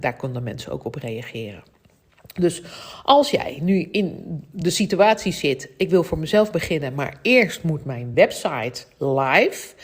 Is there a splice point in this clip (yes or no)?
no